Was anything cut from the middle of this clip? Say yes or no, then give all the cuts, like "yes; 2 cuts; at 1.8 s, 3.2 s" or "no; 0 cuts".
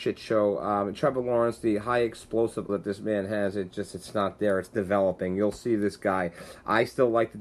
yes; 1 cut; at 2.7 s